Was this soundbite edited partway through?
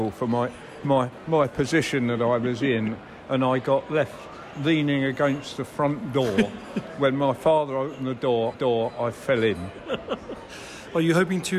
yes; 1 cut; at 8.5 s

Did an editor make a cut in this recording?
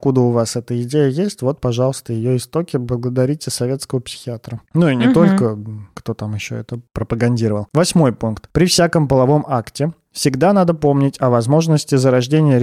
yes; 1 cut; at 4.7 s

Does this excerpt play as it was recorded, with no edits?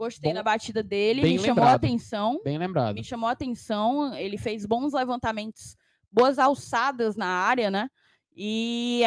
yes; 0 cuts

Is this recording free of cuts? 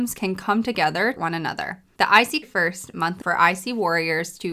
no; 3 cuts; at 1.2 s, 2.4 s, 3.2 s

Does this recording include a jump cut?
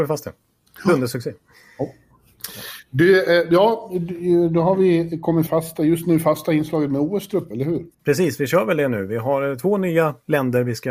yes; 3 cuts; at 5.5 s, 7.5 s, 7.9 s

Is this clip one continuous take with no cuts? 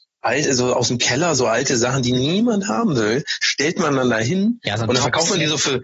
yes; 0 cuts

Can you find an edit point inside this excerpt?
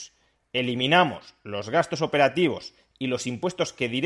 no; 0 cuts

